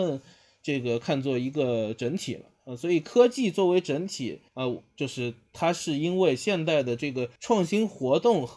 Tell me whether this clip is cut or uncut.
cut